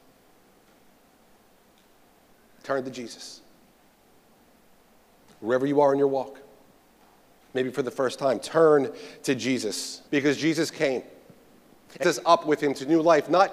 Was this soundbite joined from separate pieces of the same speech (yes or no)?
yes